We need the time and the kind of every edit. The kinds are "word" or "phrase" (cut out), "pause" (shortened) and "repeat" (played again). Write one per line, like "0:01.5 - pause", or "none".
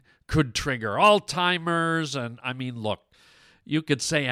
none